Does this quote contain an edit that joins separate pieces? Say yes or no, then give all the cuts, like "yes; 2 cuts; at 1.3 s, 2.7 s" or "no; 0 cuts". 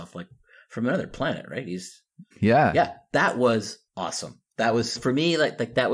yes; 3 cuts; at 2.3 s, 3.9 s, 5.0 s